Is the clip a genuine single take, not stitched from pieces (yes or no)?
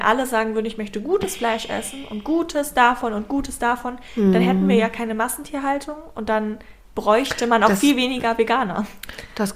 yes